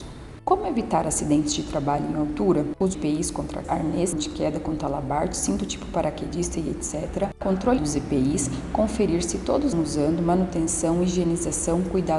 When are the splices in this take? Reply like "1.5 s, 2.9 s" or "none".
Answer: 2.9 s, 3.6 s, 4.1 s, 7.8 s, 9.7 s

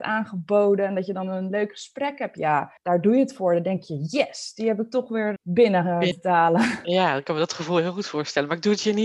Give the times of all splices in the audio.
2.8 s, 5.4 s, 6.1 s

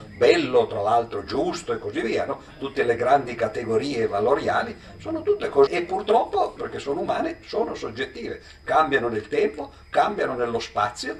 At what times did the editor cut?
5.7 s, 6.6 s

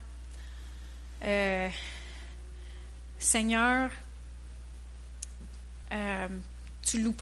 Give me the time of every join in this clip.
none

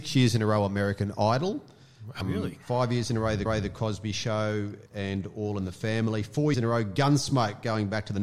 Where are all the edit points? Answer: 2.2 s, 2.6 s, 3.5 s, 4.9 s, 6.5 s

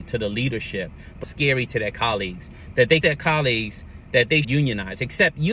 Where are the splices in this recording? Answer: 1.2 s, 3.0 s, 4.4 s

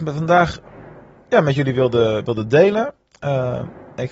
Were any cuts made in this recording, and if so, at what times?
none

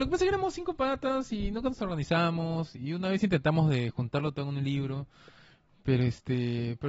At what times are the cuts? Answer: none

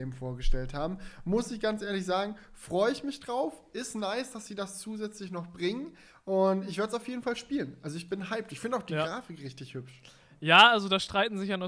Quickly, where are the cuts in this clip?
none

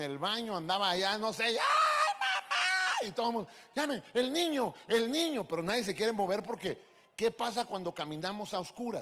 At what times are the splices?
none

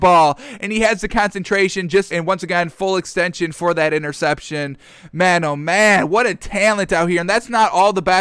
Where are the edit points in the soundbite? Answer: 2.1 s

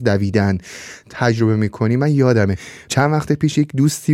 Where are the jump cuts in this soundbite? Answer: none

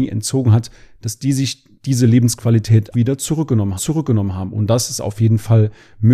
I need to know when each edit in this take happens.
2.9 s, 3.8 s

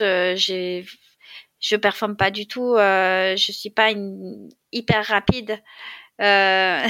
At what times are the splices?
none

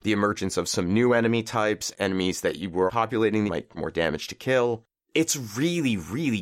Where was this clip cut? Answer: 1.9 s, 2.9 s, 3.5 s, 3.8 s

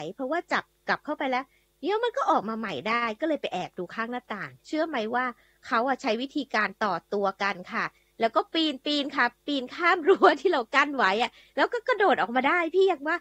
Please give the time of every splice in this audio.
4.6 s

